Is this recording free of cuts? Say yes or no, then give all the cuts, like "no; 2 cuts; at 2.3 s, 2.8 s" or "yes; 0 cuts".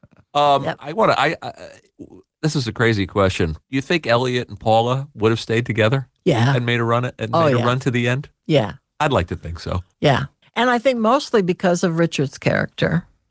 no; 3 cuts; at 3.6 s, 6.2 s, 10.4 s